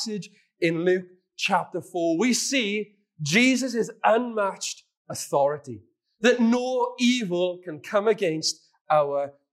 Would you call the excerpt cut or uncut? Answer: uncut